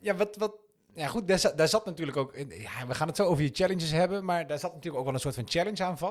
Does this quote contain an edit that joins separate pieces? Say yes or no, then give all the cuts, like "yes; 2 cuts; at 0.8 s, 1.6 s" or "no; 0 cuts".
no; 0 cuts